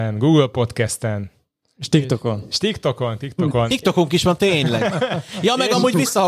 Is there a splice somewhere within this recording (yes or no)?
no